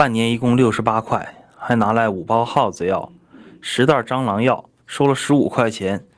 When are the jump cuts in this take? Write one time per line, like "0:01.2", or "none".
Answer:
0:04.8